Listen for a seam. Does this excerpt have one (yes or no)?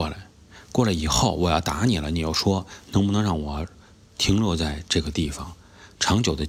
no